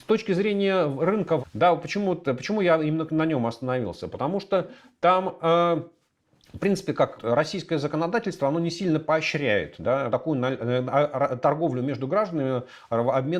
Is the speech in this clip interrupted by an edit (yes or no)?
yes